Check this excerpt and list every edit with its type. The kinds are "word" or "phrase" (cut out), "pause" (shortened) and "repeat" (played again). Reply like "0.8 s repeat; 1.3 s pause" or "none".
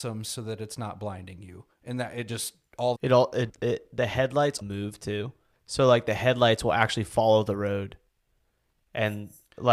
3.0 s phrase; 3.5 s word; 4.6 s word; 5.5 s pause